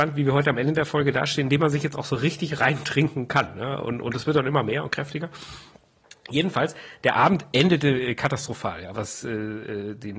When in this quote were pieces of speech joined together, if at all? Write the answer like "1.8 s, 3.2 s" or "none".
8.9 s